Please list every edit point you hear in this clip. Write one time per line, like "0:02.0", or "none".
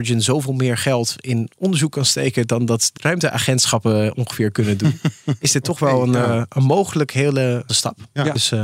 0:03.0
0:07.7